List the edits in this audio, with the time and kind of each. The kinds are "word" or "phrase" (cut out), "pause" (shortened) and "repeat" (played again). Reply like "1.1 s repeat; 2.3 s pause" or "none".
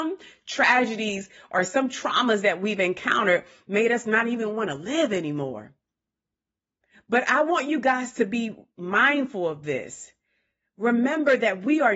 none

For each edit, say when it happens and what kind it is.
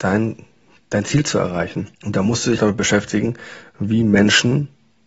1.9 s pause; 2.6 s word

